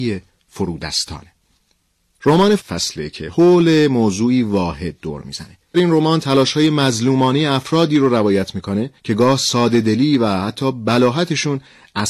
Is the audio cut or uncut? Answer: cut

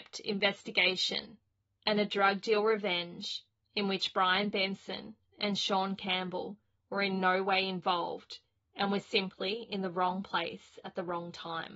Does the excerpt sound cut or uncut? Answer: uncut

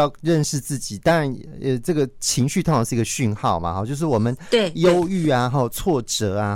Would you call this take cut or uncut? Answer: uncut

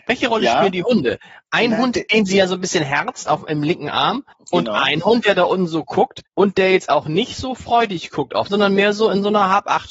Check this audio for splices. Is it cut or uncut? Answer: cut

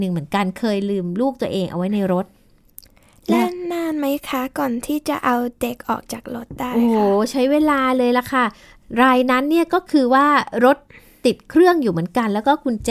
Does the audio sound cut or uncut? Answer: uncut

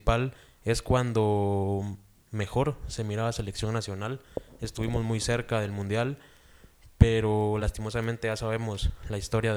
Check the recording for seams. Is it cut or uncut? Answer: uncut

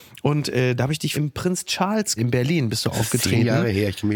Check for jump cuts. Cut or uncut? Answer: cut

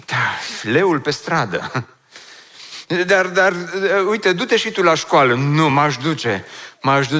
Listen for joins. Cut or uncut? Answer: uncut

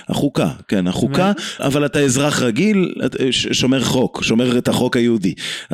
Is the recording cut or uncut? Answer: cut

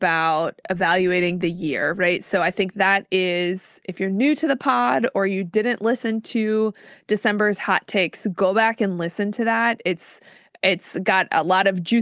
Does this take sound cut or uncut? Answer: uncut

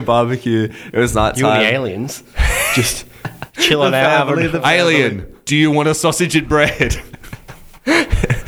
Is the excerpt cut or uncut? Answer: uncut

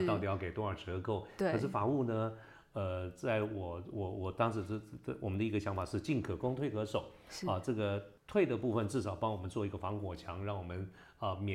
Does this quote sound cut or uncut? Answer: cut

